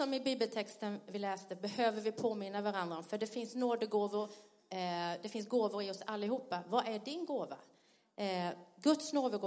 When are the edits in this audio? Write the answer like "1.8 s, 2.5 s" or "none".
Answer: none